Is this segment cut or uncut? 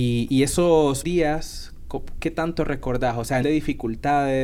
cut